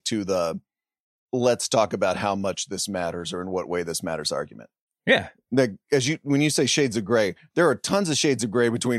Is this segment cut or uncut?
uncut